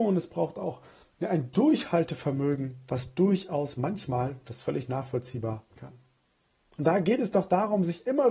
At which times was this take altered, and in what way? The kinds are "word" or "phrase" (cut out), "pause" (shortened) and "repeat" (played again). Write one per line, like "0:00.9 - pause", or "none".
0:05.7 - phrase